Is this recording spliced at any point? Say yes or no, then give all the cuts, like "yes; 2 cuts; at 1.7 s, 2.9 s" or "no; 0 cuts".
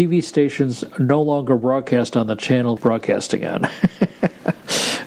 yes; 1 cut; at 2.8 s